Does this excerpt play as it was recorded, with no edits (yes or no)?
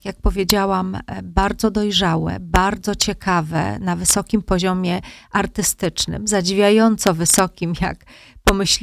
yes